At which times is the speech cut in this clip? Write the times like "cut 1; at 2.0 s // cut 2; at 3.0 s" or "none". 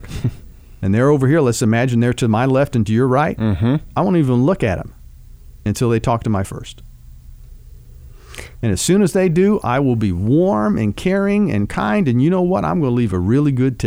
cut 1; at 6.4 s